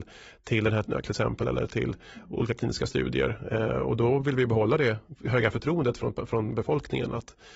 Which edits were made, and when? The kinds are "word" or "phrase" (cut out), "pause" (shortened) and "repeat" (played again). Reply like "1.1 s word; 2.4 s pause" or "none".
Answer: 1.0 s word; 5.2 s word